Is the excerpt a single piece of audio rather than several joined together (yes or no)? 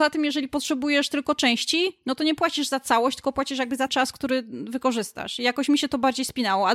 no